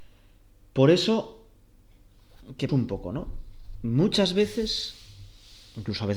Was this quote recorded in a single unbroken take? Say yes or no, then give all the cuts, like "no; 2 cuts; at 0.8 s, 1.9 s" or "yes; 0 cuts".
no; 1 cut; at 2.7 s